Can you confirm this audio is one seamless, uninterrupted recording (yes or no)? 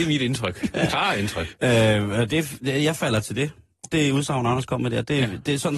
yes